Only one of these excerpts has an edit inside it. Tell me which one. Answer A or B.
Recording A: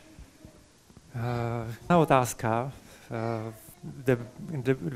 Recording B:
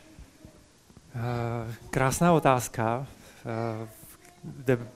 A